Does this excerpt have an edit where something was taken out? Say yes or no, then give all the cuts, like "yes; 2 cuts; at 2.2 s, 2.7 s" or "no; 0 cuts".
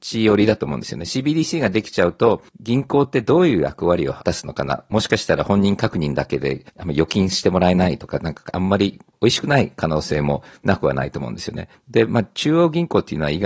yes; 2 cuts; at 2.5 s, 6.7 s